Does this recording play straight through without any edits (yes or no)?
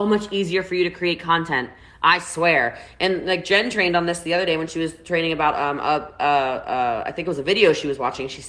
yes